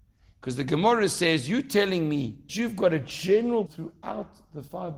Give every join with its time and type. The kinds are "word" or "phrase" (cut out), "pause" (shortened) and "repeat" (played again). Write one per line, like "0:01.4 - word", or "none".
0:02.5 - word
0:03.7 - word